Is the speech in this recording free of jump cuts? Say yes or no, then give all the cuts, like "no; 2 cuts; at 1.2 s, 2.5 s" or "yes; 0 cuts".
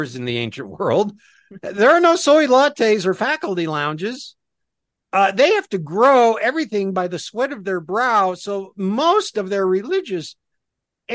yes; 0 cuts